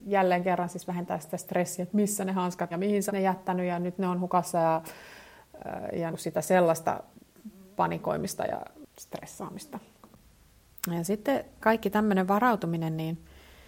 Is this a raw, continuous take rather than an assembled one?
no; 4 cuts; at 2.7 s, 3.1 s, 6.1 s, 11.6 s

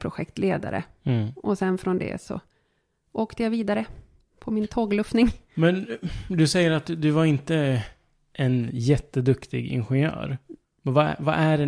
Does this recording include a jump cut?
no; 0 cuts

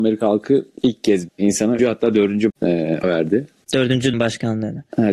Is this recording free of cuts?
no; 5 cuts; at 1.3 s, 1.8 s, 2.5 s, 3.0 s, 4.1 s

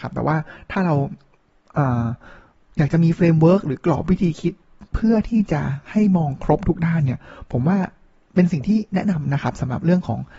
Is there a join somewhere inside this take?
no; 0 cuts

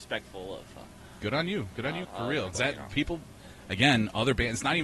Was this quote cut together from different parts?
yes; 2 cuts; at 2.0 s, 2.5 s

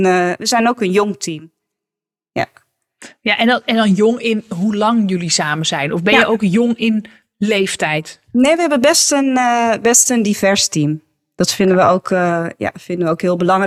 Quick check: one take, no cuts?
yes; 0 cuts

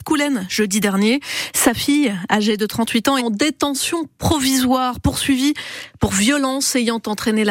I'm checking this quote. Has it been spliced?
yes; 1 cut; at 3.2 s

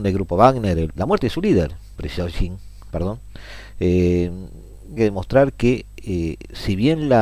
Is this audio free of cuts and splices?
no; 4 cuts; at 1.0 s, 2.0 s, 2.9 s, 5.0 s

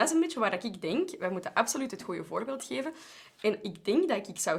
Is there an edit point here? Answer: no; 0 cuts

